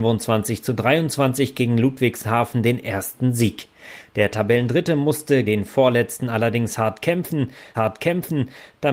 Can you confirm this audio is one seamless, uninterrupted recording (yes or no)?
no